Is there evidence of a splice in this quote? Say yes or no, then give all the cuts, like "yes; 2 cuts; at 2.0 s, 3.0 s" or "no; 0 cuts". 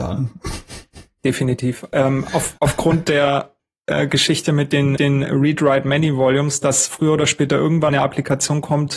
yes; 3 cuts; at 2.6 s, 5.0 s, 7.9 s